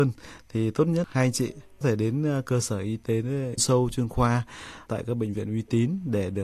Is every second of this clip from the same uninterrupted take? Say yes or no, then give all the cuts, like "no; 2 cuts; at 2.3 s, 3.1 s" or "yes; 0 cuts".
no; 3 cuts; at 1.8 s, 3.6 s, 4.9 s